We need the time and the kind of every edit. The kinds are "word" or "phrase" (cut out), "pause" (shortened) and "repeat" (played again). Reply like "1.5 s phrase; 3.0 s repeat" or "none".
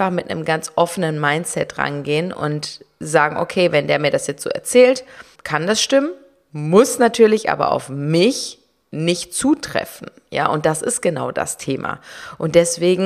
5.4 s word